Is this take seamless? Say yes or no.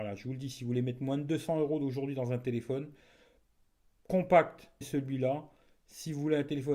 no